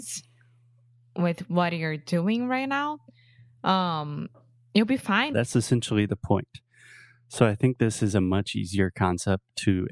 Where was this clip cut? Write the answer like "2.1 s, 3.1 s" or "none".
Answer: 5.3 s